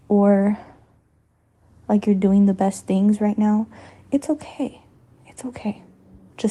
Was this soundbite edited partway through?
no; 0 cuts

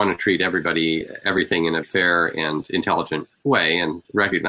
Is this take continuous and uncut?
no; 1 cut; at 1.8 s

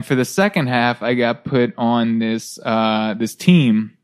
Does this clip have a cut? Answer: no; 0 cuts

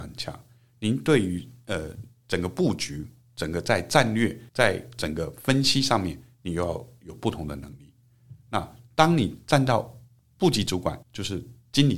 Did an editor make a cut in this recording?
yes; 2 cuts; at 4.5 s, 11.0 s

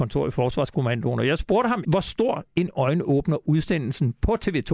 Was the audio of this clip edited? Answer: yes; 1 cut; at 1.8 s

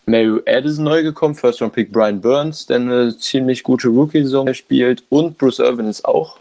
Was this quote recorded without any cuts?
no; 1 cut; at 4.5 s

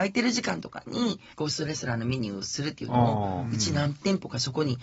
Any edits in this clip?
yes; 1 cut; at 1.3 s

